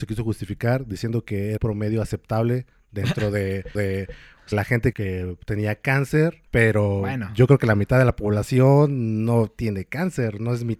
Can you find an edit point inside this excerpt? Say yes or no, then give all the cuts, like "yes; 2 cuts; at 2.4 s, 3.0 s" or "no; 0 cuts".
yes; 5 cuts; at 1.6 s, 3.7 s, 4.5 s, 4.9 s, 6.5 s